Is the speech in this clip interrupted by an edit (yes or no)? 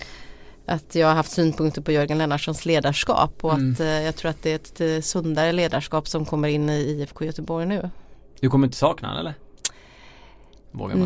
no